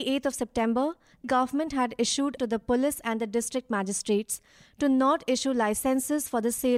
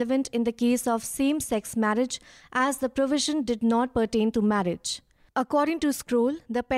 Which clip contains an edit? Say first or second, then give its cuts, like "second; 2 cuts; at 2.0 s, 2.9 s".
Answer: first; 2 cuts; at 1.2 s, 2.4 s